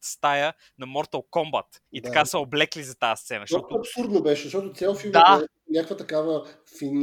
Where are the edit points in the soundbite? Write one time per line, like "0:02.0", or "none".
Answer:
0:01.9